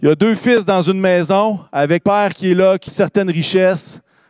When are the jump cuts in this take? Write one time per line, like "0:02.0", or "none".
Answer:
0:02.0
0:02.9